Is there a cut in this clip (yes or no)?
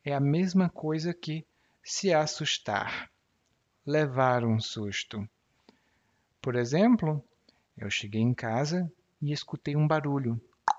no